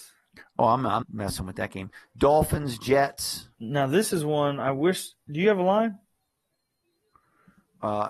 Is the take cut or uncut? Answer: cut